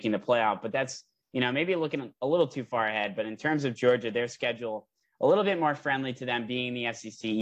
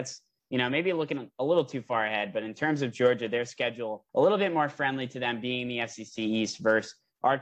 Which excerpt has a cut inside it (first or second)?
second